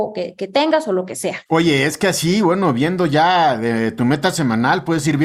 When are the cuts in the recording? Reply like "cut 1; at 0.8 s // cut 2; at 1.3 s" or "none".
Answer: cut 1; at 1.5 s